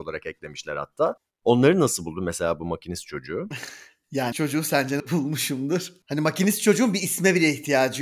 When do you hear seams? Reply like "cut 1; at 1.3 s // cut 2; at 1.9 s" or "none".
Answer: cut 1; at 4.3 s // cut 2; at 5.0 s